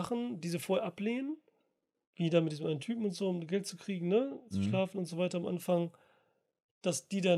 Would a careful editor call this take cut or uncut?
uncut